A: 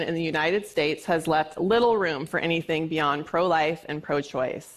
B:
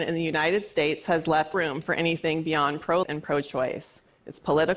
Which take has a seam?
B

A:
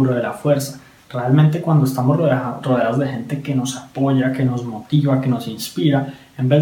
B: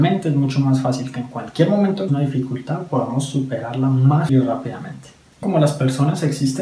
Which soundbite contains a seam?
B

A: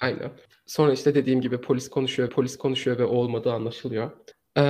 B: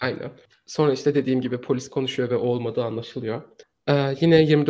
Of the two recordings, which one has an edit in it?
A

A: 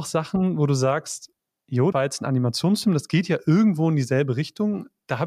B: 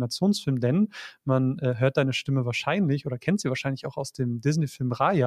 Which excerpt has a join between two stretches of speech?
A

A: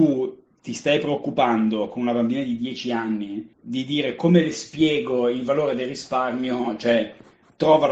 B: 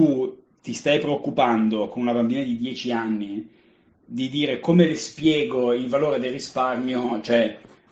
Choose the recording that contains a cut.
A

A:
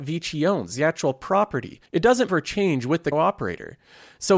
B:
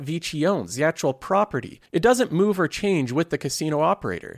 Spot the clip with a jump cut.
A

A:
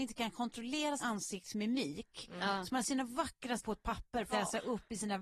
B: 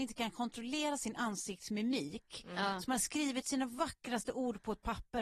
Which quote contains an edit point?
A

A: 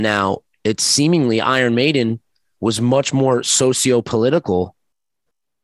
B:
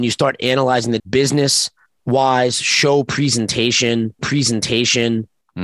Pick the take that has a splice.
B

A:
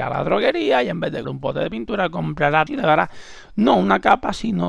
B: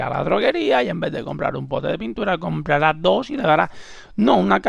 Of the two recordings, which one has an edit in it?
A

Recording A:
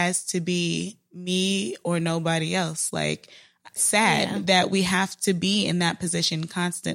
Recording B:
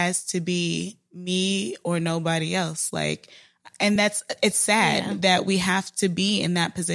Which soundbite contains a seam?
A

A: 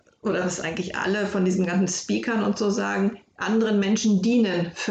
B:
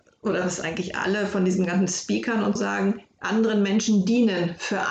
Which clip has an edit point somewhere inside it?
B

